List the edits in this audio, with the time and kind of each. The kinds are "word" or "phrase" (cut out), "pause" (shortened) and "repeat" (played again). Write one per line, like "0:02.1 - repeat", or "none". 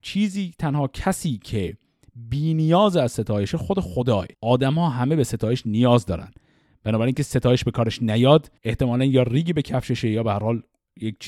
0:04.3 - pause
0:07.1 - word
0:08.6 - pause

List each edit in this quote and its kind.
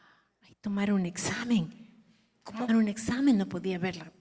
0:02.7 - phrase

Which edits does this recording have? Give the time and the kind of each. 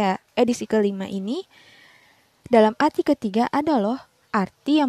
none

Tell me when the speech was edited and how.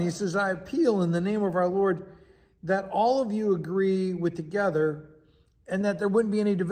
none

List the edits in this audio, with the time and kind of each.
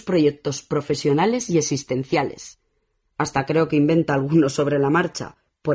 none

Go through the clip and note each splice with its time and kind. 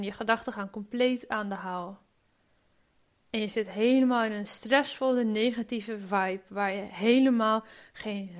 none

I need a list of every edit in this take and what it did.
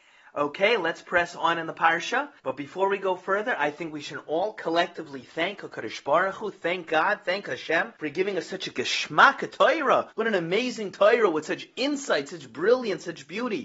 0:02.4 - pause
0:08.0 - pause
0:10.1 - pause

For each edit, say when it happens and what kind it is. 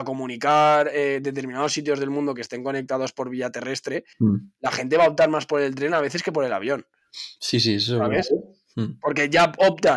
0:04.1 - pause
0:07.4 - pause

